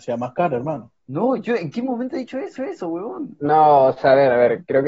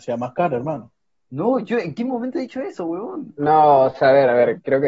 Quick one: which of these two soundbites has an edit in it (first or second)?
first